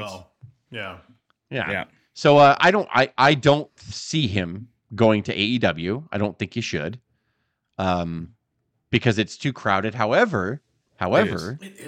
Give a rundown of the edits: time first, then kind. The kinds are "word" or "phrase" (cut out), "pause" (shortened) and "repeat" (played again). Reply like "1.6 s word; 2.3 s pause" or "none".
none